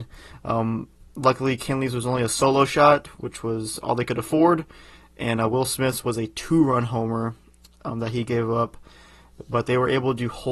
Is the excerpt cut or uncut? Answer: uncut